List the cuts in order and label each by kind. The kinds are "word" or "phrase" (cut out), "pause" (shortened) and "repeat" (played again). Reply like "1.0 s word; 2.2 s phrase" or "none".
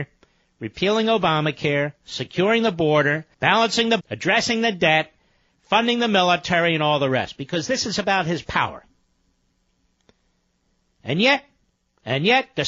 3.3 s pause; 4.0 s word